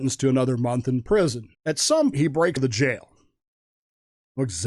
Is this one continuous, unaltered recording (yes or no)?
no